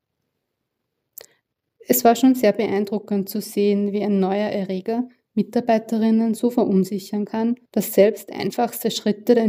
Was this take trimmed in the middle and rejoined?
yes; 1 cut; at 7.7 s

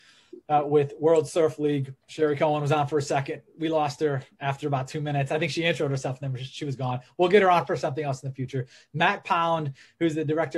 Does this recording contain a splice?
yes; 1 cut; at 2.0 s

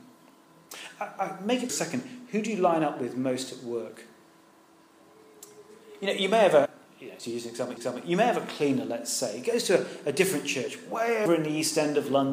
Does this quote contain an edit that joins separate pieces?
yes; 5 cuts; at 1.7 s, 6.7 s, 7.2 s, 7.8 s, 11.3 s

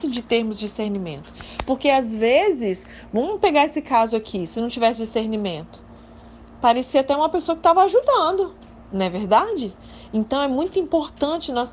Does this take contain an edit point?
no; 0 cuts

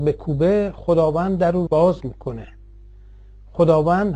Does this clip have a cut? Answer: yes; 1 cut; at 1.7 s

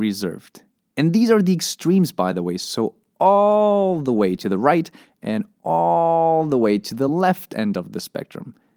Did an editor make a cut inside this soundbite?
no; 0 cuts

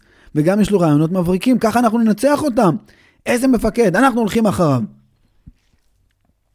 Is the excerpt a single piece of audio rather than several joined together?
yes; 0 cuts

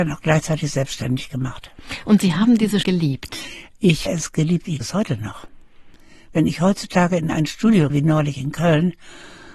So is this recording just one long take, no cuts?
no; 4 cuts; at 2.8 s, 4.1 s, 4.8 s, 7.9 s

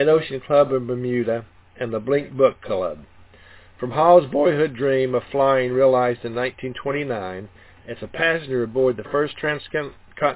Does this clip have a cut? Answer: no; 0 cuts

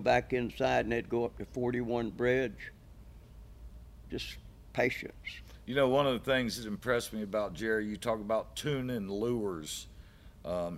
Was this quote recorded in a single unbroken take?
yes; 0 cuts

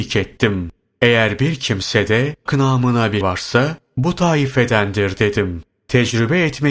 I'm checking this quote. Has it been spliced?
yes; 2 cuts; at 2.5 s, 3.2 s

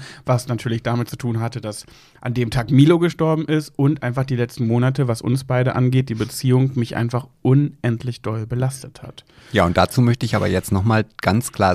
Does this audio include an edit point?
no; 0 cuts

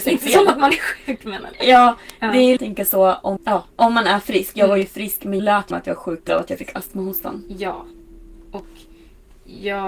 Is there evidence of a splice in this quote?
yes; 5 cuts; at 2.6 s, 3.4 s, 5.4 s, 5.7 s, 6.3 s

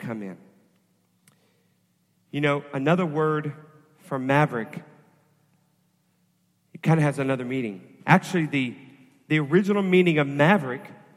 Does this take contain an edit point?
no; 0 cuts

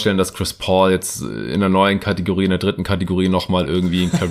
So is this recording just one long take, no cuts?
yes; 0 cuts

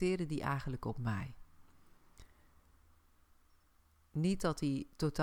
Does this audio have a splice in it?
no; 0 cuts

